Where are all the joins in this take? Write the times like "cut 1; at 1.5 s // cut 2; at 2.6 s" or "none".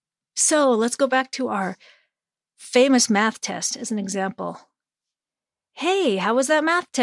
none